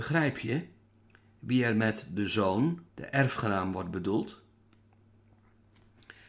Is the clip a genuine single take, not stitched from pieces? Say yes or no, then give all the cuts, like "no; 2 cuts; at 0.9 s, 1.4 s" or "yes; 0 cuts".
no; 1 cut; at 2.9 s